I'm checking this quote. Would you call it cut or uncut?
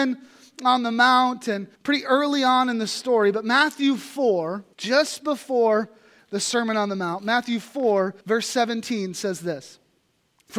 cut